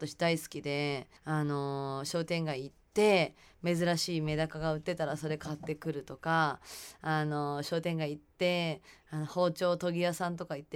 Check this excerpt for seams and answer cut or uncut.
cut